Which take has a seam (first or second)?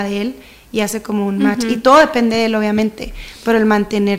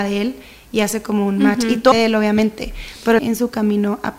second